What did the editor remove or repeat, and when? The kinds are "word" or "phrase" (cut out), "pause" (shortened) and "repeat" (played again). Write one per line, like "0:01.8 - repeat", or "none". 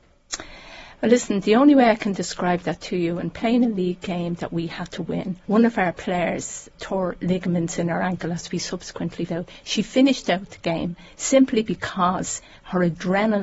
0:05.4 - pause
0:06.8 - word
0:09.3 - word